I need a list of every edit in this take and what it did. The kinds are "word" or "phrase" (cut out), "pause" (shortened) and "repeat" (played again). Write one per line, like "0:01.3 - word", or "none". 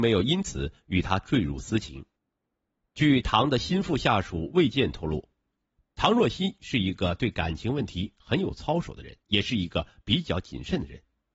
0:09.2 - pause